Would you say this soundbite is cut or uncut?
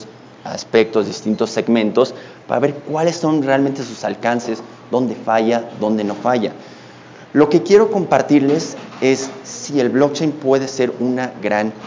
uncut